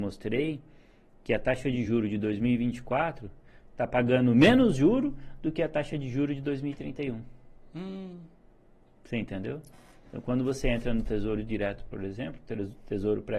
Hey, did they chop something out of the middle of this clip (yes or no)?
no